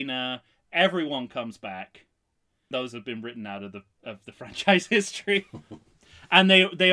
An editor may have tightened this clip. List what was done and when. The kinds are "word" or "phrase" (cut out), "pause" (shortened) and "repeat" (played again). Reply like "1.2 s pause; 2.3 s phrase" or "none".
2.7 s word